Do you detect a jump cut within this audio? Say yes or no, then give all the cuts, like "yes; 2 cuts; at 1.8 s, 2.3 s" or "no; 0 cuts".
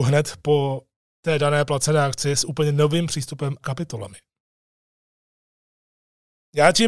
yes; 1 cut; at 3.6 s